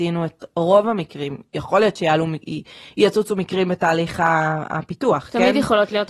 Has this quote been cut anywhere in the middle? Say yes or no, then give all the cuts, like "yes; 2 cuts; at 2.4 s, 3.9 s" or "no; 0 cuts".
no; 0 cuts